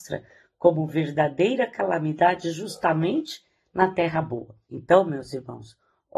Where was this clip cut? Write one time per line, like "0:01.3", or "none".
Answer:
0:04.6